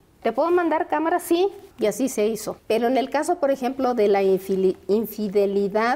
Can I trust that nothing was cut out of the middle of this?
no; 2 cuts; at 1.7 s, 2.6 s

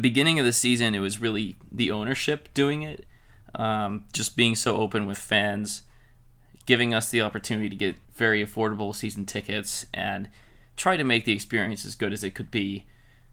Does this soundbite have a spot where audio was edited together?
yes; 1 cut; at 8.0 s

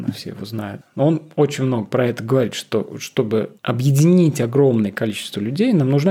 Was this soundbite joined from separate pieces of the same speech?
yes; 1 cut; at 3.6 s

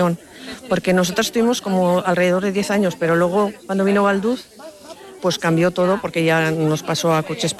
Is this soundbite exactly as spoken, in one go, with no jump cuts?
yes; 0 cuts

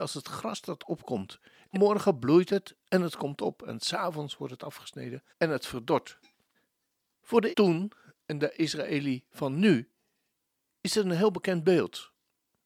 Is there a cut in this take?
yes; 4 cuts; at 1.7 s, 5.3 s, 6.5 s, 7.5 s

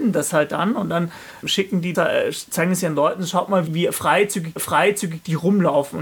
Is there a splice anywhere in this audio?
yes; 4 cuts; at 1.4 s, 1.9 s, 3.7 s, 4.6 s

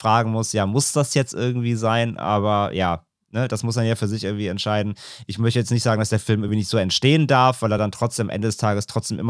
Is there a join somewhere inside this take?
no; 0 cuts

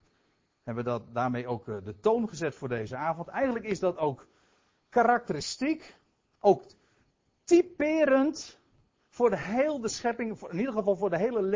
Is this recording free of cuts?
yes; 0 cuts

